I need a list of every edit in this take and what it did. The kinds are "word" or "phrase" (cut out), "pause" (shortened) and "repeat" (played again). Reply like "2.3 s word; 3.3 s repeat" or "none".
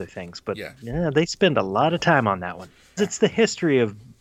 3.0 s word